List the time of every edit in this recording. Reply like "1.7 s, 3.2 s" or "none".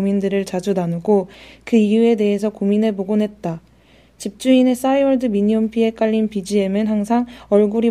none